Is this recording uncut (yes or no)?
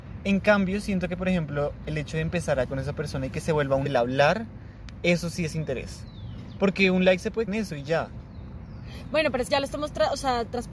no